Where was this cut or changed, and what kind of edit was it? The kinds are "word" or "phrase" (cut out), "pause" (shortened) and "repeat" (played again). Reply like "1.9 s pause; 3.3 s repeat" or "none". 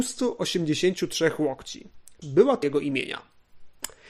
2.2 s word; 2.6 s word